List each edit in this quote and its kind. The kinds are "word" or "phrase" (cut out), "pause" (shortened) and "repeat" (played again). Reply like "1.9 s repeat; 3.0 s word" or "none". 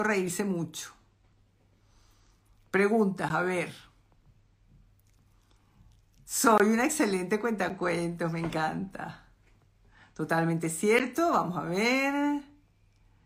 none